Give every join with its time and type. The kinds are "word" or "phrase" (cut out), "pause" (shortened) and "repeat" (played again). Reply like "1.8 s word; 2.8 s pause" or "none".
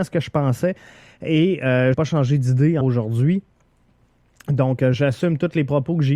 1.9 s word; 2.8 s word; 4.9 s word